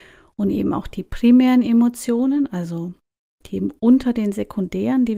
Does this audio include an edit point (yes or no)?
no